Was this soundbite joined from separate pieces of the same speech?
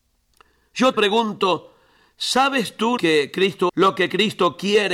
yes; 3 cuts; at 0.9 s, 3.0 s, 3.7 s

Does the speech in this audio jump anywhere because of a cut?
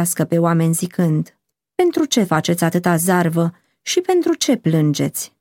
no; 0 cuts

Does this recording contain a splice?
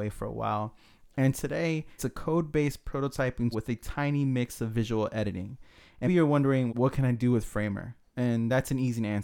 yes; 4 cuts; at 2.0 s, 3.5 s, 6.1 s, 6.7 s

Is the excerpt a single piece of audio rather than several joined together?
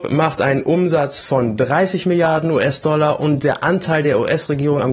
yes; 0 cuts

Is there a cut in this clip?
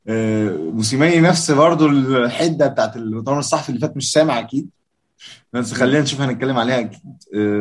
no; 0 cuts

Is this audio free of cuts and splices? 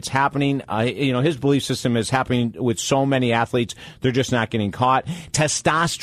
yes; 0 cuts

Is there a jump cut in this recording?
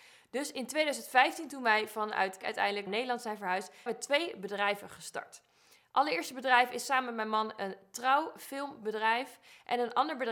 yes; 3 cuts; at 2.4 s, 2.9 s, 3.9 s

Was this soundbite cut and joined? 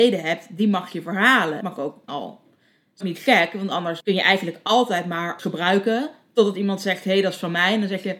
yes; 5 cuts; at 1.6 s, 2.1 s, 3.0 s, 4.0 s, 5.4 s

